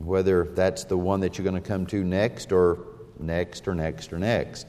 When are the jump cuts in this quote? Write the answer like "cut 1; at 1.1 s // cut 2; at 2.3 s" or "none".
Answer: none